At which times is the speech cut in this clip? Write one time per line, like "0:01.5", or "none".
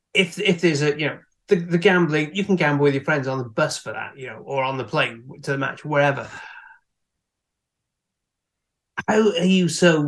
none